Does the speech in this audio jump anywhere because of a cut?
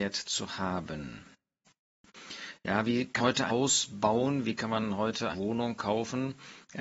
yes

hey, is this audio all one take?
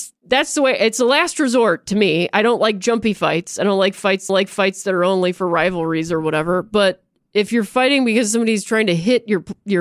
no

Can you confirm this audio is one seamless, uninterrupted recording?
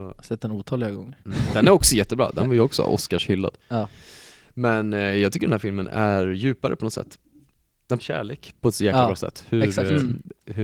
no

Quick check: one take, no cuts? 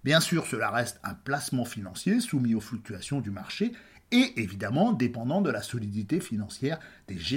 yes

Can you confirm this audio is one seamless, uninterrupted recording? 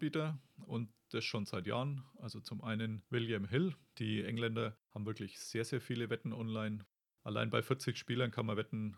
yes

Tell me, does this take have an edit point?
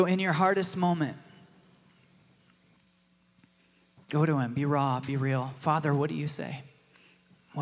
no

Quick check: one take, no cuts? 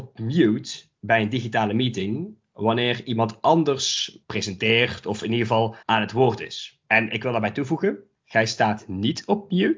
no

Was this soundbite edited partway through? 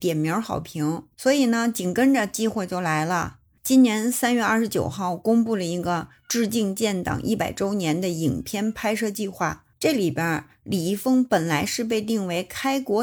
yes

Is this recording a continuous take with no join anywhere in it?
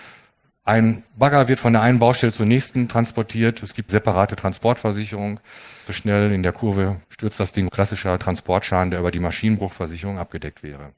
no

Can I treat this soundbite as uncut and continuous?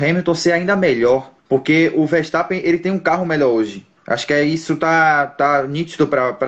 no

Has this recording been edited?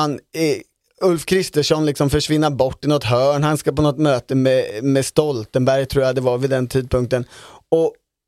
no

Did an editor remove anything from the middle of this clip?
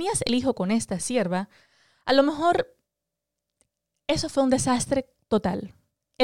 no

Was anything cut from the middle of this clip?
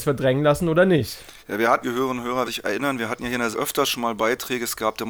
yes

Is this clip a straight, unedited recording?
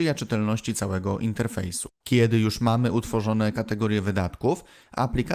no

